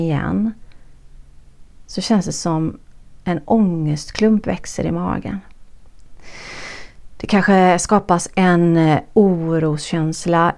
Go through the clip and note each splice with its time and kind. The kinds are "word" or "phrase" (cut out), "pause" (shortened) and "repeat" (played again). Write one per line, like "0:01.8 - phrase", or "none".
none